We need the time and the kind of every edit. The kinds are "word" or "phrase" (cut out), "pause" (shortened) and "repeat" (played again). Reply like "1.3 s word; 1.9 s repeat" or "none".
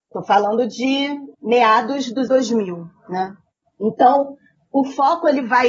1.3 s pause; 2.3 s word